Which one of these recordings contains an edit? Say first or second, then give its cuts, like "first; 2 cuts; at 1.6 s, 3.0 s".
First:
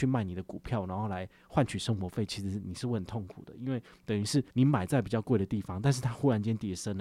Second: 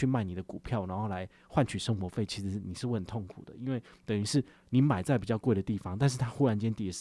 first; 1 cut; at 4.5 s